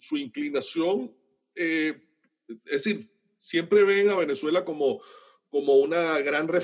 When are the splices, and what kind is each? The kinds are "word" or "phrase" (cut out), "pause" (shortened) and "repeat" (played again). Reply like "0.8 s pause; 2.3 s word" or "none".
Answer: none